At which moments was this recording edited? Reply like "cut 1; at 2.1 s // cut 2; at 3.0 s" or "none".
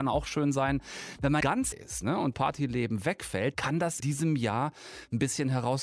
cut 1; at 1.4 s // cut 2; at 1.7 s // cut 3; at 2.3 s // cut 4; at 3.5 s // cut 5; at 4.0 s